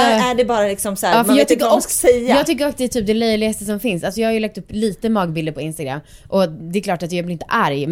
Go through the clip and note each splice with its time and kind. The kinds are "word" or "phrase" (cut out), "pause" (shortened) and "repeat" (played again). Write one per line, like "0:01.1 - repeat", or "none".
none